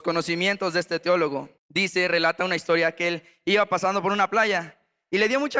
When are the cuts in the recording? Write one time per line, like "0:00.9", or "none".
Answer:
0:01.6